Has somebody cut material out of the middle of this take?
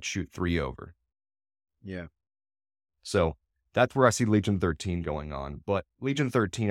no; 0 cuts

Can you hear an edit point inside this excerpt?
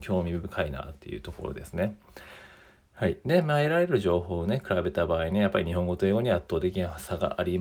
no; 0 cuts

